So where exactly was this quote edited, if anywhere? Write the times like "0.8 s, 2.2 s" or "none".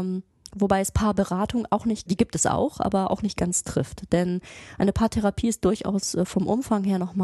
2.1 s